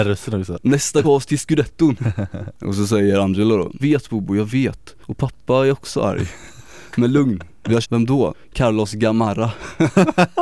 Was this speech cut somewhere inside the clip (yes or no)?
yes